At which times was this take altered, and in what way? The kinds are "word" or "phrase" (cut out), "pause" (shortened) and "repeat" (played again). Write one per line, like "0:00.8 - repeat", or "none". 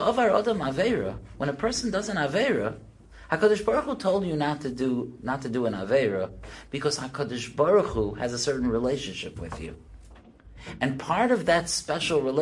none